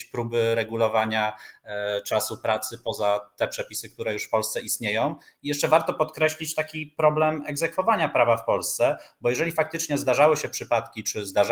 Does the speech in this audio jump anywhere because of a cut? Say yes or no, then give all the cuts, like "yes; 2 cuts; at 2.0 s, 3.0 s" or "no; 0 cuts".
no; 0 cuts